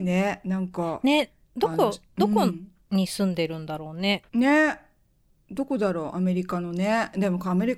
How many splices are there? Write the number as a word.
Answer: one